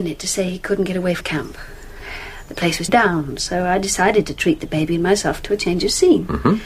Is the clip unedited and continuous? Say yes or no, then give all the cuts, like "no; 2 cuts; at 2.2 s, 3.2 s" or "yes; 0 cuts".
no; 2 cuts; at 1.2 s, 2.9 s